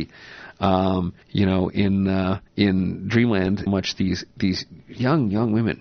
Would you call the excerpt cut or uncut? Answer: cut